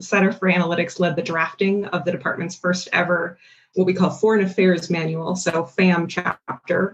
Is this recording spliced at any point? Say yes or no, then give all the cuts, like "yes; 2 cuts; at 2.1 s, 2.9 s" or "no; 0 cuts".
yes; 1 cut; at 3.7 s